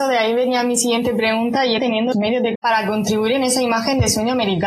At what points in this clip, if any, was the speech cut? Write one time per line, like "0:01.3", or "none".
0:01.8
0:02.1
0:02.6